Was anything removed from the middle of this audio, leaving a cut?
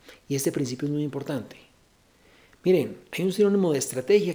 no; 0 cuts

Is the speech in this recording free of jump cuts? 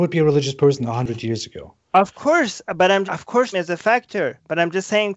no; 2 cuts; at 3.1 s, 3.5 s

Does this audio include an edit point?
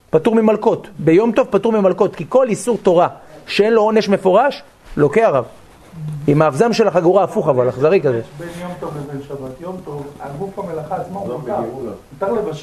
no; 0 cuts

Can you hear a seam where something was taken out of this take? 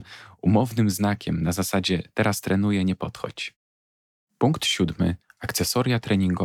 no; 0 cuts

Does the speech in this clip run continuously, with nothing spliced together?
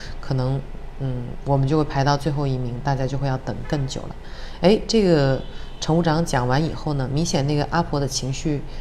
yes; 0 cuts

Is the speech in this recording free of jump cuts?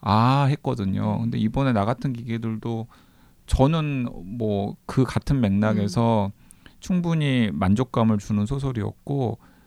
yes; 0 cuts

